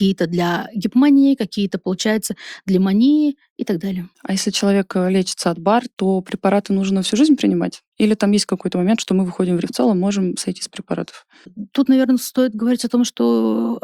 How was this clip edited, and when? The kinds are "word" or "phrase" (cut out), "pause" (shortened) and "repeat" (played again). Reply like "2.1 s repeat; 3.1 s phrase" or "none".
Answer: 9.6 s word

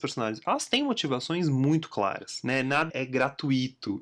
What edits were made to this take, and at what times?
2.9 s word

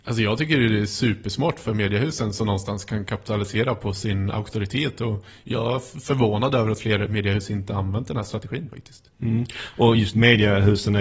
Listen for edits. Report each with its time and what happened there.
none

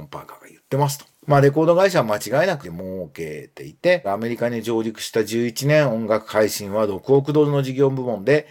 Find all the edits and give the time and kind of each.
1.2 s pause; 2.6 s word; 4.0 s word

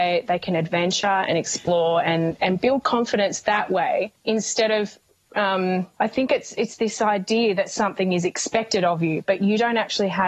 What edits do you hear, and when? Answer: none

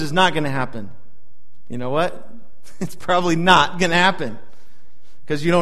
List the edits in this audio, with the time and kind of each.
none

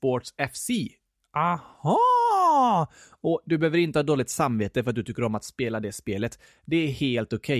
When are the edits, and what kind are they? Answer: none

